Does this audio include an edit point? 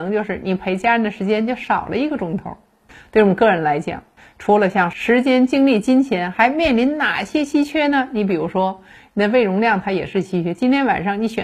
no; 0 cuts

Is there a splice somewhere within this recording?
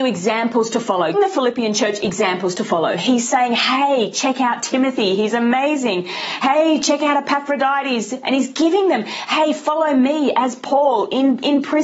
yes; 1 cut; at 1.1 s

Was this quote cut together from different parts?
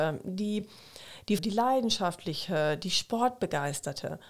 yes; 1 cut; at 1.4 s

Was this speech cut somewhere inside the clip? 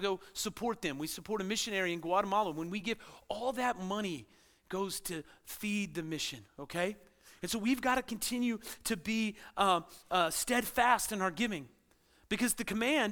no; 0 cuts

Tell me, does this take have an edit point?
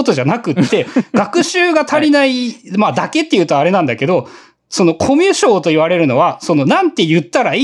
no; 0 cuts

